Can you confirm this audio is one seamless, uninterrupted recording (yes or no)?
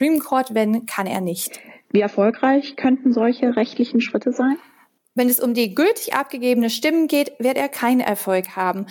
yes